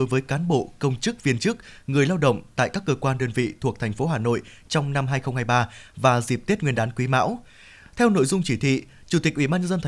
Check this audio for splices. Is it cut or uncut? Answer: uncut